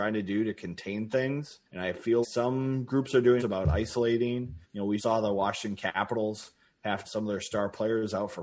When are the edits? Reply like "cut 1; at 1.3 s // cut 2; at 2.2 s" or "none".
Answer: cut 1; at 1.7 s // cut 2; at 2.2 s // cut 3; at 3.4 s // cut 4; at 4.6 s // cut 5; at 5.0 s // cut 6; at 7.0 s